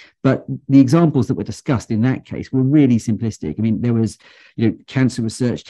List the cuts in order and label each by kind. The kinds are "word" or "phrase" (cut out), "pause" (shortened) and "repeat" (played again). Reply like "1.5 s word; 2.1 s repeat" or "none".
none